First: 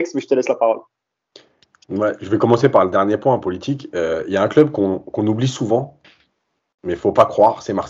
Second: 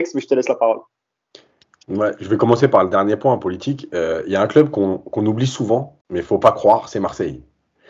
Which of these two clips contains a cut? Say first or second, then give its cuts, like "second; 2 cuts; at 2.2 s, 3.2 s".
second; 1 cut; at 6.0 s